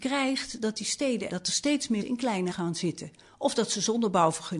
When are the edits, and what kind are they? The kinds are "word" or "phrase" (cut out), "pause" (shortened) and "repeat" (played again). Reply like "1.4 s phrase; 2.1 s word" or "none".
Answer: 1.3 s word; 2.0 s word; 2.5 s word